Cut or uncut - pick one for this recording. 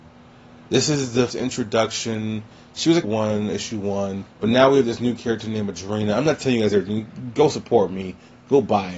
cut